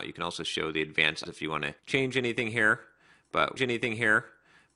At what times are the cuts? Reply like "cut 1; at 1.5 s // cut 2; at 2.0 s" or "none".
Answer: cut 1; at 1.3 s // cut 2; at 1.8 s // cut 3; at 3.6 s